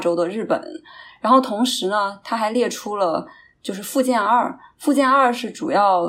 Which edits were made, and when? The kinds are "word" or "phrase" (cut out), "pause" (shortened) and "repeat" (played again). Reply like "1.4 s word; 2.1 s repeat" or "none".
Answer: none